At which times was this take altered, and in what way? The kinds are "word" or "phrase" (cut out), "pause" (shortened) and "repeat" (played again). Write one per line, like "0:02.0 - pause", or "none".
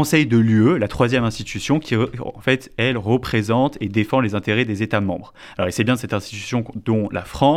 none

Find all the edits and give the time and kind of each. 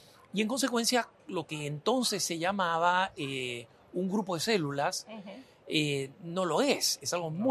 none

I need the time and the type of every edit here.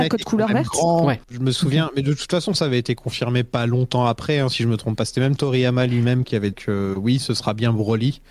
0:01.2 - pause
0:06.5 - word

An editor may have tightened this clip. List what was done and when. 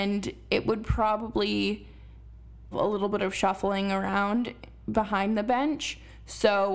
0:02.7 - word

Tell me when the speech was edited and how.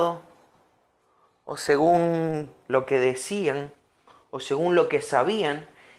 none

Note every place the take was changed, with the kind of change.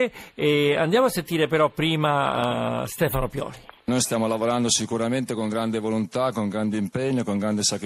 0:03.8 - pause

